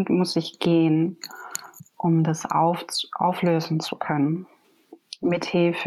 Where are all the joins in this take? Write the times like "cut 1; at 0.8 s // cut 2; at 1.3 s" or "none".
cut 1; at 1.8 s